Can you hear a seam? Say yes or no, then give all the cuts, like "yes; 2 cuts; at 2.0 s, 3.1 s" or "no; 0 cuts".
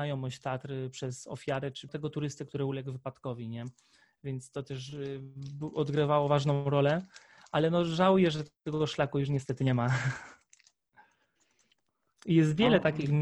yes; 1 cut; at 1.9 s